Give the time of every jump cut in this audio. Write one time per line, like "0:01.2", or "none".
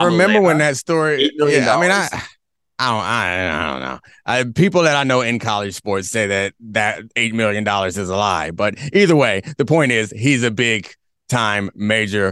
none